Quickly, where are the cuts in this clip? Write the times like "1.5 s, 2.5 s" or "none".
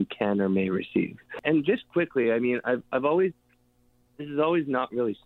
none

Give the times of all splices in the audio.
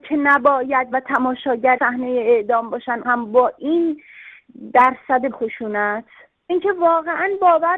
0.9 s, 1.8 s, 3.0 s, 5.3 s, 6.5 s

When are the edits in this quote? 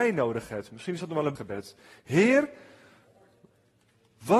1.4 s

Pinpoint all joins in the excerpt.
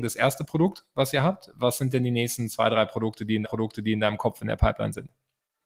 3.4 s

